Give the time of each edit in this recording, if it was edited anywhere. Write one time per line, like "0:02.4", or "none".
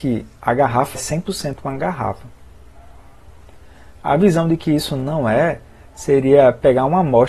0:00.9